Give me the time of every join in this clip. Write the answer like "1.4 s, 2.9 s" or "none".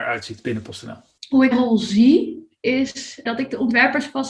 1.2 s, 1.5 s, 3.3 s